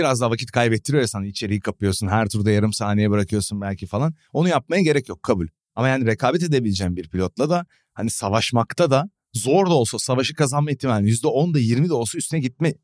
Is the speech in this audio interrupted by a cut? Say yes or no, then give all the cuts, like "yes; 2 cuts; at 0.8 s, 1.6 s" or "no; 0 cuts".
no; 0 cuts